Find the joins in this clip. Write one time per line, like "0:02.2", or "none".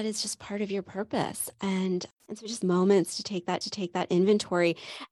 0:02.6
0:03.6